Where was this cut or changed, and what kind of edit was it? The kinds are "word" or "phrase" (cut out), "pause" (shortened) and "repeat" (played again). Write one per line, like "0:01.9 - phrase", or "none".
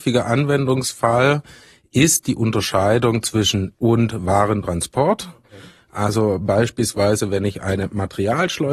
0:03.7 - word